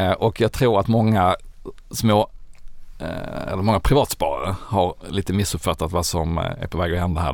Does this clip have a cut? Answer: no; 0 cuts

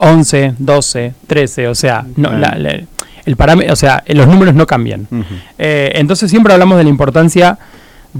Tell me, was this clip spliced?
no; 0 cuts

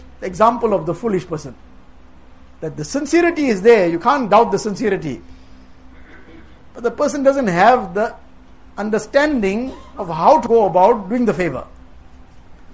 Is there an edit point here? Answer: no; 0 cuts

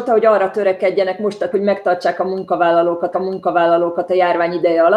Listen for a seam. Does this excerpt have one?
yes; 2 cuts; at 1.5 s, 3.1 s

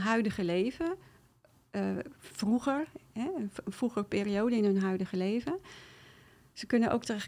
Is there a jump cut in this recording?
no; 0 cuts

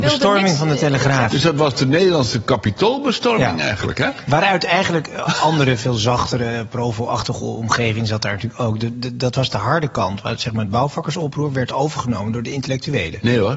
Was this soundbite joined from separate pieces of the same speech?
yes; 1 cut; at 8.9 s

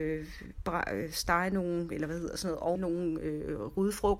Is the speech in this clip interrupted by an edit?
yes; 1 cut; at 2.8 s

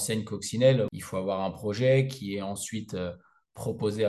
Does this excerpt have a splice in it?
no; 0 cuts

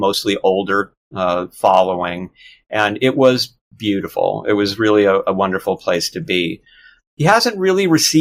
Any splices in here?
no; 0 cuts

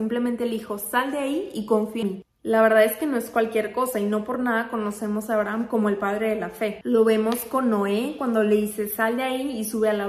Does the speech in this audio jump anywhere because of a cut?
yes; 1 cut; at 2.0 s

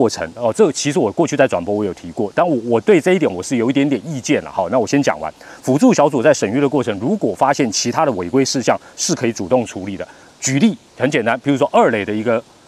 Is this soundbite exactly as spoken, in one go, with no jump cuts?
no; 1 cut; at 10.9 s

